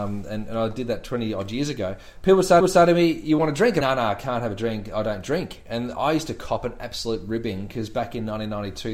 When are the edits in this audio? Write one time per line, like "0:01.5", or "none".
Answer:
0:02.6
0:03.8